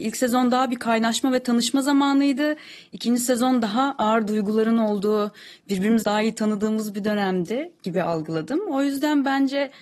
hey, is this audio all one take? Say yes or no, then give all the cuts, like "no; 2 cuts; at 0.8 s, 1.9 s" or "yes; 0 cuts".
no; 1 cut; at 6.0 s